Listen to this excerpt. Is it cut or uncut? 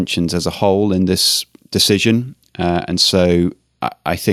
uncut